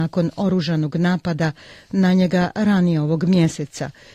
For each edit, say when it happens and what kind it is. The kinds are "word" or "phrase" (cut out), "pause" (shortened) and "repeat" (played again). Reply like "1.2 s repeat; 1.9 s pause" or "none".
none